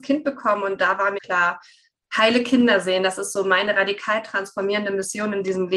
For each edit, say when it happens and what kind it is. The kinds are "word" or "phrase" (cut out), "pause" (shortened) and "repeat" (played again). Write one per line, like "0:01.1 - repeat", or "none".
0:01.2 - word